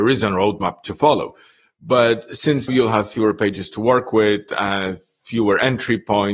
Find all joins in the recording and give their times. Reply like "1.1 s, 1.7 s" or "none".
2.7 s